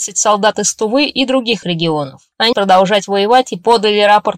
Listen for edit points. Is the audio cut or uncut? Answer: cut